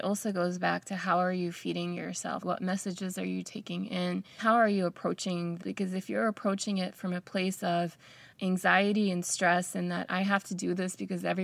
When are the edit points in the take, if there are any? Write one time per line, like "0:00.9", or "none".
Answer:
0:02.4
0:04.4
0:05.6
0:08.3